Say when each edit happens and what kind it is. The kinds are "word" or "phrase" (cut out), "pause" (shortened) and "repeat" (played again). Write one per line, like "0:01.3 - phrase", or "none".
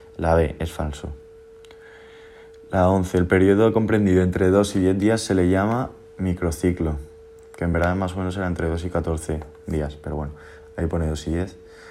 none